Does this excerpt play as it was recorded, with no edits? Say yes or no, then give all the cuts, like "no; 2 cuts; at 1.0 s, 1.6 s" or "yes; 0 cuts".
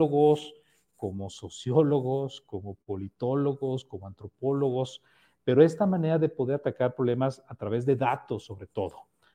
yes; 0 cuts